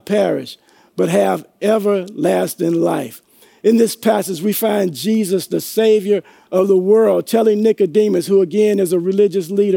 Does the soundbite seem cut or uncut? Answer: uncut